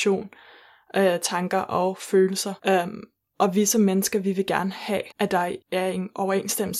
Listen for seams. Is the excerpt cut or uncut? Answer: cut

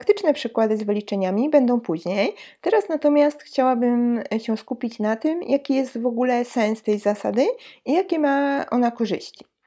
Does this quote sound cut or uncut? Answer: uncut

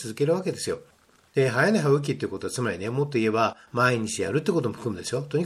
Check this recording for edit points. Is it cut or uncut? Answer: uncut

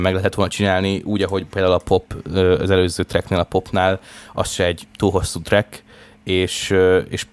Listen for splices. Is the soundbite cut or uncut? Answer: uncut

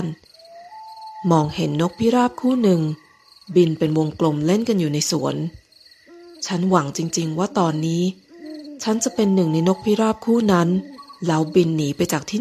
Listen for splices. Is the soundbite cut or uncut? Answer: cut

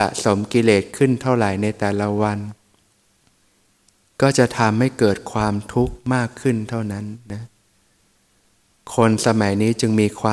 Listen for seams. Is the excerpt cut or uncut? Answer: uncut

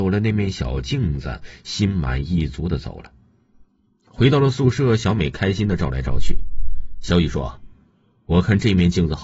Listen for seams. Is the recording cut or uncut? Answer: uncut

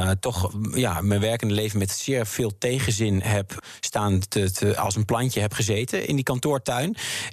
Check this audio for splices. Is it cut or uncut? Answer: uncut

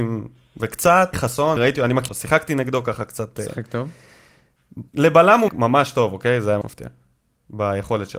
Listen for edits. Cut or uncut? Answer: cut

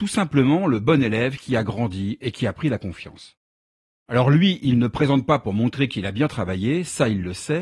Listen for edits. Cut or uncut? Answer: uncut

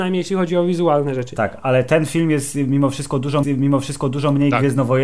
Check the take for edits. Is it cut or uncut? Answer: cut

